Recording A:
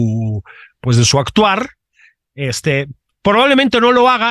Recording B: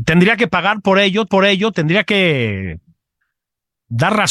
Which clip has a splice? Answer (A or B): B